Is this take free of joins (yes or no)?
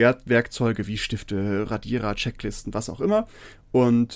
yes